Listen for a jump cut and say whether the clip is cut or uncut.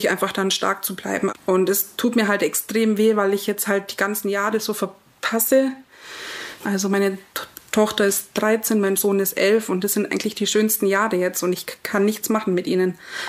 cut